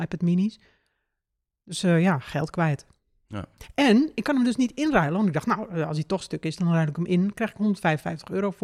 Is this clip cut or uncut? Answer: uncut